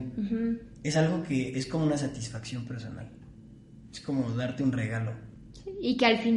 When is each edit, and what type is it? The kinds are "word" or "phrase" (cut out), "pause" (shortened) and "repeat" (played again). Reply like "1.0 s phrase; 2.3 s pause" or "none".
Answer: none